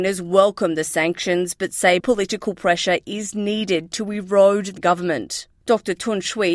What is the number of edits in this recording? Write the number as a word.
two